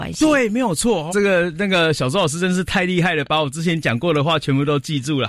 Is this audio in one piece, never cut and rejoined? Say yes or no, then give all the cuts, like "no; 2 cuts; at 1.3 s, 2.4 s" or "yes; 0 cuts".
no; 1 cut; at 1.1 s